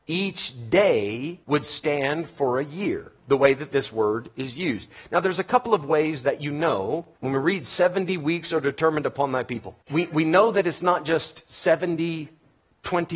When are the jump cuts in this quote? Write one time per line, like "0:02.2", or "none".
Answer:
0:01.4
0:03.2
0:07.1
0:09.8